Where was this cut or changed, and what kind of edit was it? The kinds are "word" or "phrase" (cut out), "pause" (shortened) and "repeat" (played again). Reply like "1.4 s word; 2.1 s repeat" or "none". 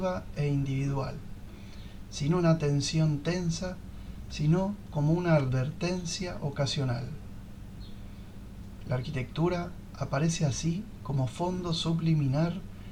none